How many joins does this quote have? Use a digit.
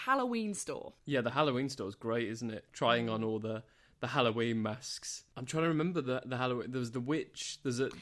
0